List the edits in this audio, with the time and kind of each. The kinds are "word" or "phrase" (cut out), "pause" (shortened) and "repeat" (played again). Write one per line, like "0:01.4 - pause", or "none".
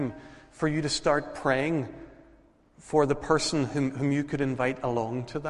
none